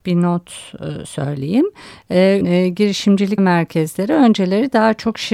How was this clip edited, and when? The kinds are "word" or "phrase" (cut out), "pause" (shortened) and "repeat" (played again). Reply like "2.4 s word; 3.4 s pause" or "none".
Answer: 2.4 s word; 3.4 s word